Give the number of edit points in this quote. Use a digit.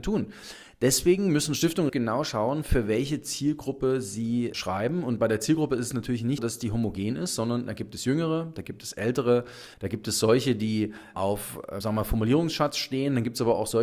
6